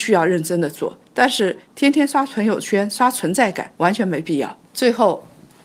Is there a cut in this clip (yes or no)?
yes